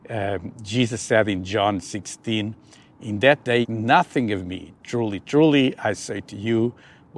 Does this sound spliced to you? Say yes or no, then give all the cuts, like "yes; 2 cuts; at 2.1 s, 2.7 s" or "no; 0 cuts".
yes; 1 cut; at 3.6 s